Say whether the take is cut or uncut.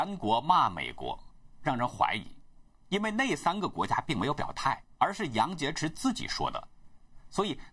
cut